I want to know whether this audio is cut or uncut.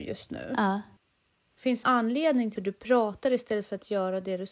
cut